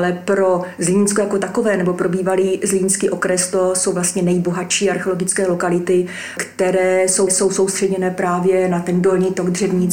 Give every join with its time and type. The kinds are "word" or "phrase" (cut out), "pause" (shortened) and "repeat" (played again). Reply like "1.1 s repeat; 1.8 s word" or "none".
7.3 s repeat